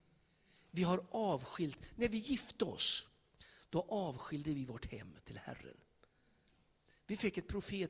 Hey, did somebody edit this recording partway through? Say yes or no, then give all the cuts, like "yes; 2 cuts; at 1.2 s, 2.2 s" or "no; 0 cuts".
no; 0 cuts